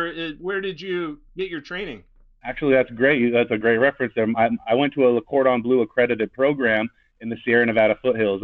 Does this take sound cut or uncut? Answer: uncut